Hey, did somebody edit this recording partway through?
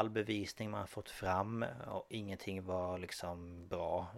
no; 0 cuts

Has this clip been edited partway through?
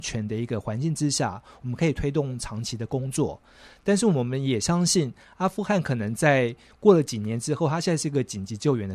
no; 0 cuts

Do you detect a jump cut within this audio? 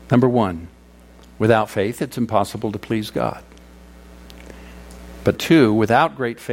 yes; 1 cut; at 5.3 s

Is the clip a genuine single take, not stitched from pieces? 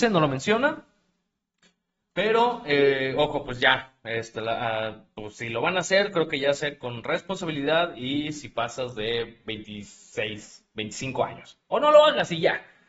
yes; 0 cuts

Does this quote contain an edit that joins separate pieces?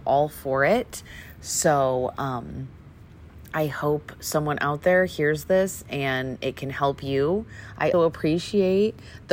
yes; 1 cut; at 7.9 s

